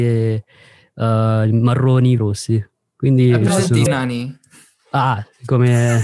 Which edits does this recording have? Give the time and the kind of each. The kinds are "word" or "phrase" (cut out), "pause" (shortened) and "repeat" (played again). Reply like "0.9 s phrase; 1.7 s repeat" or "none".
2.2 s phrase; 3.9 s word